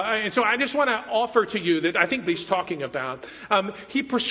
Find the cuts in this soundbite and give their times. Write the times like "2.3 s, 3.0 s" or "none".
2.3 s